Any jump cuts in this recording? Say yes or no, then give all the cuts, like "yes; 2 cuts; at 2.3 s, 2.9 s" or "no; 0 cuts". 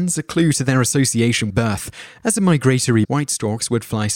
yes; 2 cuts; at 1.5 s, 3.0 s